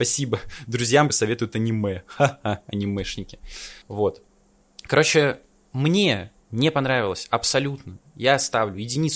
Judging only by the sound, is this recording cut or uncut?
cut